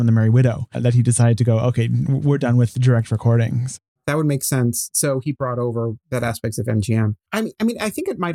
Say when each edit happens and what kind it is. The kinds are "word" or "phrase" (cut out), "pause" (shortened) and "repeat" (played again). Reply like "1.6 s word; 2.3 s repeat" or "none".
none